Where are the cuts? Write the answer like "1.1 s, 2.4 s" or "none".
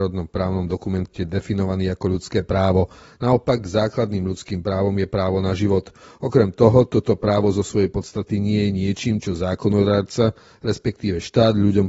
none